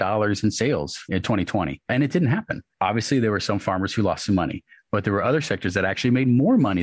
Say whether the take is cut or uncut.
uncut